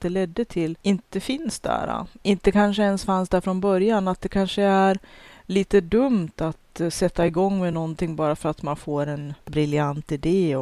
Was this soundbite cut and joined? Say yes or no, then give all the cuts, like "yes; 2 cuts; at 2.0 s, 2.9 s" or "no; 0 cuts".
no; 0 cuts